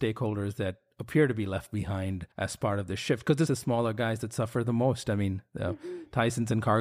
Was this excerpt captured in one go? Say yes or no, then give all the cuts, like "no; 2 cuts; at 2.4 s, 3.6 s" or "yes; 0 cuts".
no; 2 cuts; at 2.3 s, 3.5 s